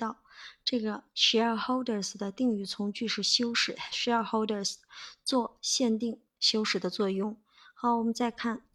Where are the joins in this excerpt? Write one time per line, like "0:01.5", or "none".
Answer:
none